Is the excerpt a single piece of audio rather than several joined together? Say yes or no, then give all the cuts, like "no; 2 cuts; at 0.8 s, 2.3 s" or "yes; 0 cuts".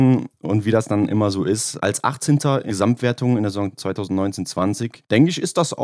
no; 1 cut; at 2.7 s